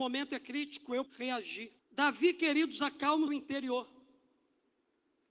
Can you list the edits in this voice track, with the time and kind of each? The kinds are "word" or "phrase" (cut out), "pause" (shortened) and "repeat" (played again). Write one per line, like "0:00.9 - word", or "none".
0:01.1 - word
0:01.8 - pause
0:03.3 - word

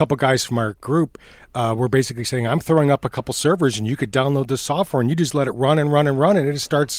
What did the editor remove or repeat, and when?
none

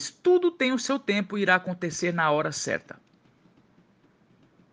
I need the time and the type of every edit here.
none

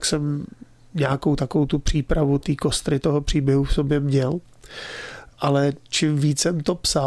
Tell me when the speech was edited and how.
none

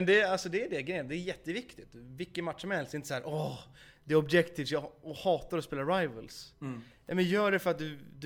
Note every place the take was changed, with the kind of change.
none

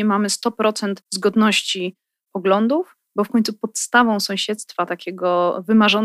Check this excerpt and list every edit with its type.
0:01.0 - pause

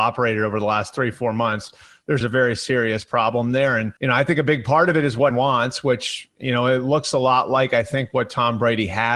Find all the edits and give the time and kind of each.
0:02.2 - phrase
0:04.0 - pause
0:05.3 - word

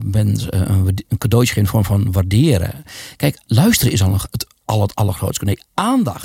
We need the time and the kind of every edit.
none

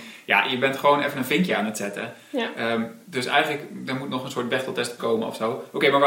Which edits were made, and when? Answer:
0:05.0 - word

